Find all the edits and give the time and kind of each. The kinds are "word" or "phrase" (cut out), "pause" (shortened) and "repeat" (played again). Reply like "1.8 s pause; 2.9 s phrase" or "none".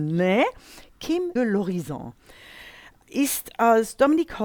1.4 s word